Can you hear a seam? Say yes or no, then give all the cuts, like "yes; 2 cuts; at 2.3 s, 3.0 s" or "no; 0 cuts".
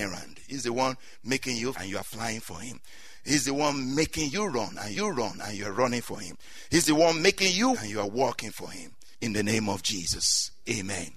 yes; 3 cuts; at 1.7 s, 4.9 s, 7.7 s